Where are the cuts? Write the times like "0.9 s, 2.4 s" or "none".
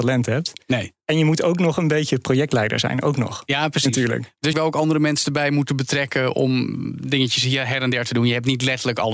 4.5 s